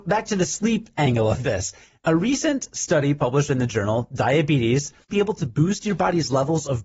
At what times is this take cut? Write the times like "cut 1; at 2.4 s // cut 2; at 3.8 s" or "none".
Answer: cut 1; at 5.1 s